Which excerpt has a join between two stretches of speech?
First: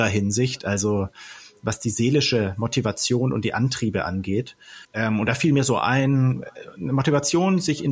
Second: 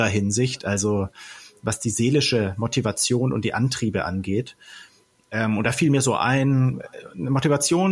first; 1 cut; at 4.8 s

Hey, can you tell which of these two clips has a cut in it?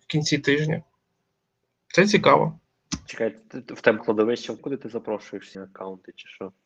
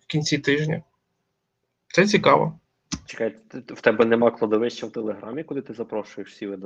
first; 3 cuts; at 4.0 s, 4.6 s, 5.5 s

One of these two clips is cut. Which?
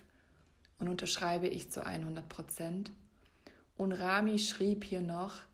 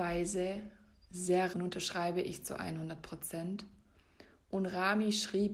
second; 1 cut; at 1.5 s

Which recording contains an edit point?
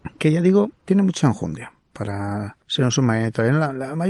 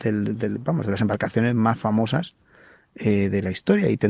first; 1 cut; at 2.6 s

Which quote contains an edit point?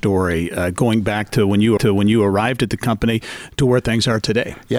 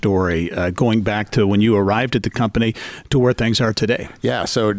first; 1 cut; at 1.8 s

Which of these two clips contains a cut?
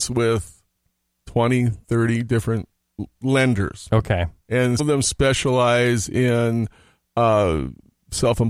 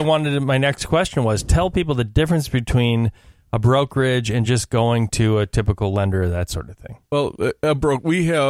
first; 1 cut; at 4.8 s

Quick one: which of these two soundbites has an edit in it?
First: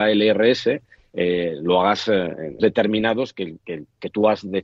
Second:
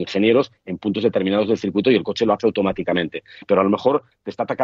first; 1 cut; at 2.6 s

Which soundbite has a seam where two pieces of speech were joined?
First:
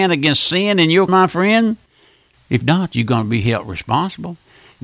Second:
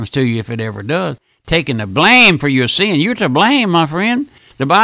first; 2 cuts; at 1.1 s, 2.6 s

